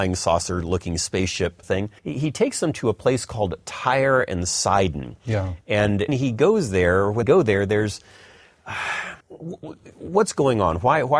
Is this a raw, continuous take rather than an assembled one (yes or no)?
no